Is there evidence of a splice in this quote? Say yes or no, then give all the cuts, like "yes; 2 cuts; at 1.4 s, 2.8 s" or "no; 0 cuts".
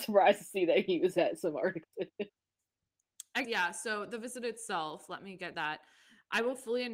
yes; 2 cuts; at 3.4 s, 5.5 s